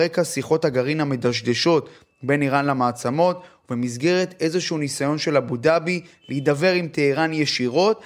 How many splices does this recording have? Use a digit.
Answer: 0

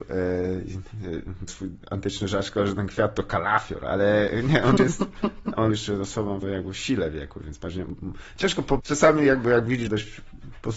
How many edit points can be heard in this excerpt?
6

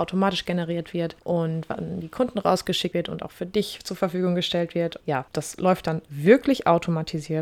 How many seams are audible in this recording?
0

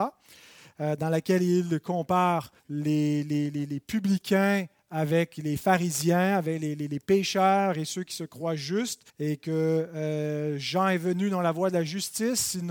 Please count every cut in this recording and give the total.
2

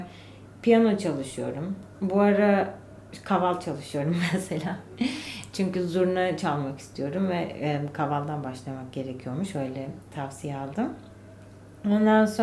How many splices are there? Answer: 1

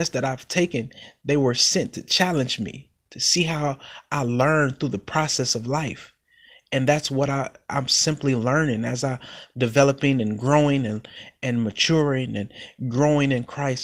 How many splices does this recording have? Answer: 0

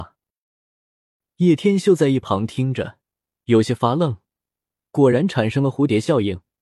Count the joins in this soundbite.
0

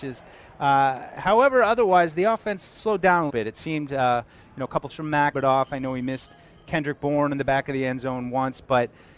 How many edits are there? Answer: 3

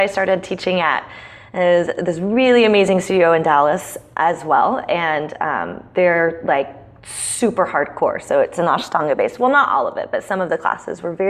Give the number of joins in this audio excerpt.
0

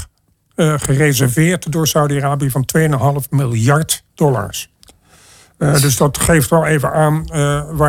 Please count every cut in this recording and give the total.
1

